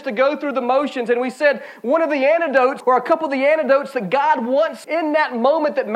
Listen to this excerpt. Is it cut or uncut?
cut